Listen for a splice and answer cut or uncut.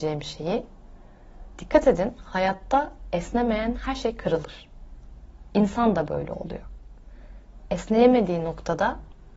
uncut